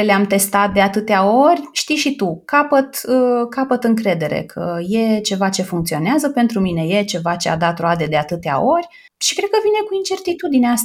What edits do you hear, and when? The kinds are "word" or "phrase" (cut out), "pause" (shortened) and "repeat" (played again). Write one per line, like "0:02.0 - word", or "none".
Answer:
none